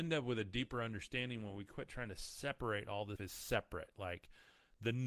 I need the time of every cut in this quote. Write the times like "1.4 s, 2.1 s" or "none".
3.2 s